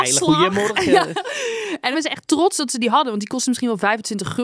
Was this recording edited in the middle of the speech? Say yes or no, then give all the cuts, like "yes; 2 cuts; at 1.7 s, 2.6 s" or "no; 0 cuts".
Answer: yes; 1 cut; at 1.9 s